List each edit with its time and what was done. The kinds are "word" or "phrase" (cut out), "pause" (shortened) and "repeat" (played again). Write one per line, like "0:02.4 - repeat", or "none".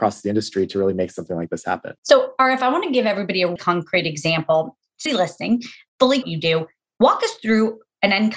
0:02.0 - pause
0:03.6 - word
0:05.1 - phrase
0:06.2 - phrase

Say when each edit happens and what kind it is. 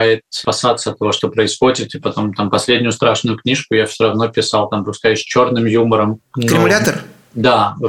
none

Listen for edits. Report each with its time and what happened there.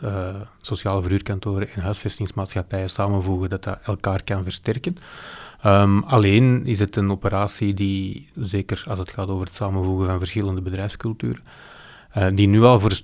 0:08.3 - phrase

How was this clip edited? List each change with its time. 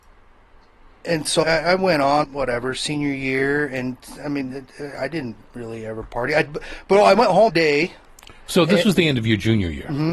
0:01.4 - word
0:02.2 - word
0:07.5 - word

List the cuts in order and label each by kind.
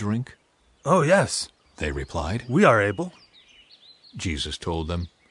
none

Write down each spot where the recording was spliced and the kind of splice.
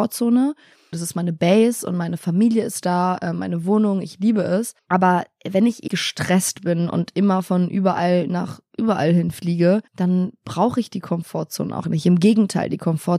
0:00.9 - word
0:04.8 - pause
0:05.9 - word
0:09.9 - pause
0:11.8 - word

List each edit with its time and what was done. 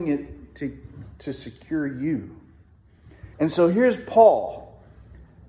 0:03.3 - pause

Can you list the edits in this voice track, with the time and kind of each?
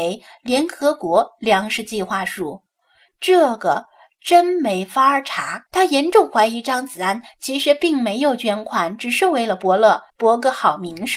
0:05.7 - pause
0:10.1 - pause

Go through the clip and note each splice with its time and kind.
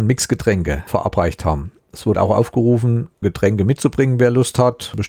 0:01.8 - pause
0:02.1 - word
0:03.2 - word

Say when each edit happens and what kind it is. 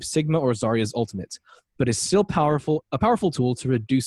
none

